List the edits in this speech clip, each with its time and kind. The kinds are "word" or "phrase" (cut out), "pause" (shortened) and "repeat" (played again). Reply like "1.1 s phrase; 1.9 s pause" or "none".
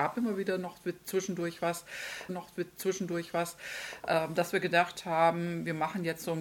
2.3 s repeat